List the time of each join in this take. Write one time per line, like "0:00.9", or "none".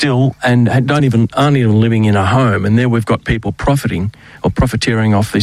none